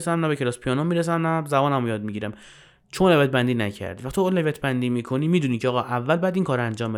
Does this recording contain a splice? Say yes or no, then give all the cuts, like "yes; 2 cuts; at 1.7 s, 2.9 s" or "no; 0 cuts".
no; 0 cuts